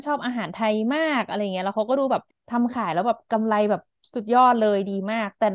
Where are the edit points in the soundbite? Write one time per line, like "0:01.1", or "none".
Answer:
0:02.3